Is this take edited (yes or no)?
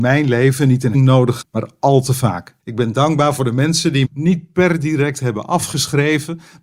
yes